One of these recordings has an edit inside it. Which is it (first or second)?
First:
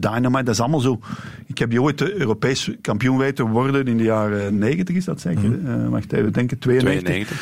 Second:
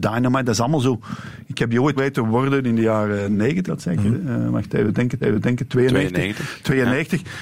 second